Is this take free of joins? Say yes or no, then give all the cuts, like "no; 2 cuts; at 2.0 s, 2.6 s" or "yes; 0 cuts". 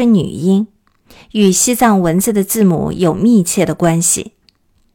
yes; 0 cuts